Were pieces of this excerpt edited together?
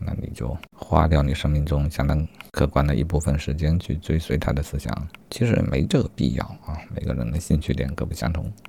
yes; 1 cut; at 5.2 s

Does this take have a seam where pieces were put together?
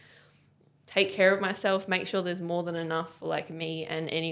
no; 0 cuts

